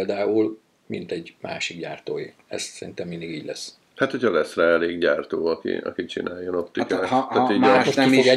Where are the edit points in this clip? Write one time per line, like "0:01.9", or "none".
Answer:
none